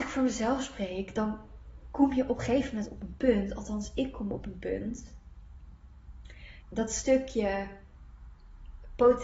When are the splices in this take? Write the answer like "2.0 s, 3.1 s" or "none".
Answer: 6.6 s